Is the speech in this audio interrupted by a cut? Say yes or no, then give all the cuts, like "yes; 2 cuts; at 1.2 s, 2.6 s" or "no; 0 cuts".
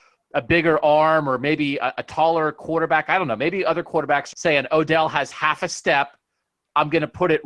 yes; 1 cut; at 4.3 s